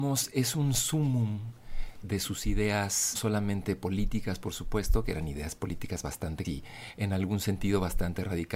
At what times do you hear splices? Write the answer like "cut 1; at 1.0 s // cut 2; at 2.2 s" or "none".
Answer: cut 1; at 2.0 s // cut 2; at 3.1 s // cut 3; at 6.4 s